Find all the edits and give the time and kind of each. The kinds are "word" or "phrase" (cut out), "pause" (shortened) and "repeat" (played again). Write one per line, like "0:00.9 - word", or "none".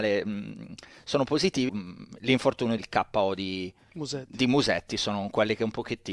0:01.7 - word
0:02.8 - phrase
0:03.9 - pause